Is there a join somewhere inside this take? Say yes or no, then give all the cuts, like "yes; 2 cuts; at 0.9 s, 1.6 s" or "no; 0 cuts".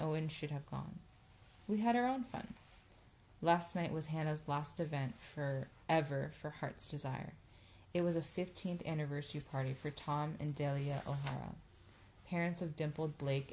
no; 0 cuts